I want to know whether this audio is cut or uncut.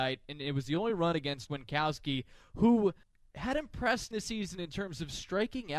cut